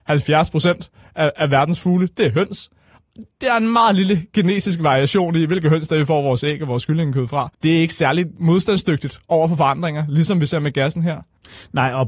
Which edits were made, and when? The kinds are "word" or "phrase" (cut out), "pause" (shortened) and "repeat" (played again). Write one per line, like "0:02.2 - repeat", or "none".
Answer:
0:07.5 - pause